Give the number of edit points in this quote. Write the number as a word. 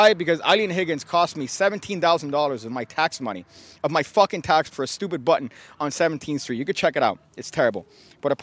one